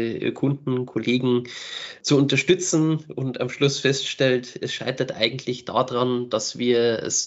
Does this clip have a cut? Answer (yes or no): no